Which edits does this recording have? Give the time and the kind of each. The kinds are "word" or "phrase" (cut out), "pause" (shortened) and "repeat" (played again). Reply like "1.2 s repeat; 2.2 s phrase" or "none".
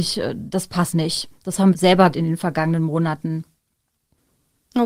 0.9 s word; 1.7 s word; 2.1 s word